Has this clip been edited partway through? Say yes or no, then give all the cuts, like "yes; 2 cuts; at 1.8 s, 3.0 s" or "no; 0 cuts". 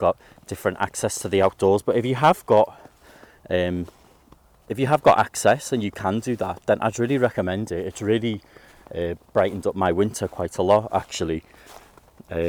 no; 0 cuts